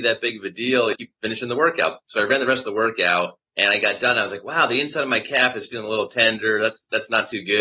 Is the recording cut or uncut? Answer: cut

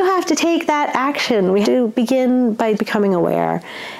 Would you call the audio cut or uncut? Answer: cut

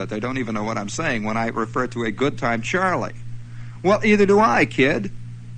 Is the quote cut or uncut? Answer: uncut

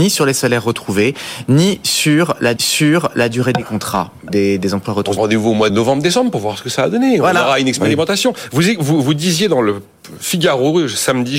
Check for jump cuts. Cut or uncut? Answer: cut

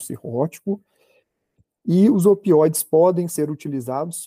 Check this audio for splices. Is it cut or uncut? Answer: uncut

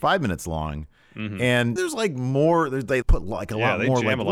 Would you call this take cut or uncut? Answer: cut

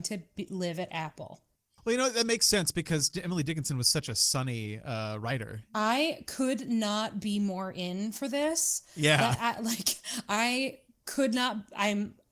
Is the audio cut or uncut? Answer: uncut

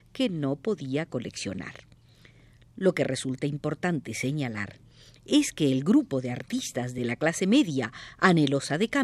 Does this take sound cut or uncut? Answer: uncut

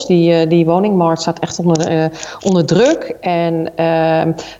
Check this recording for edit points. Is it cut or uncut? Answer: uncut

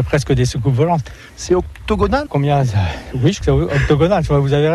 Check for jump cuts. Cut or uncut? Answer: cut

